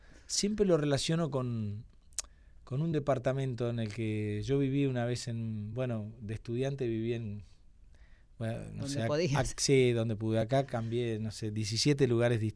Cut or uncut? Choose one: uncut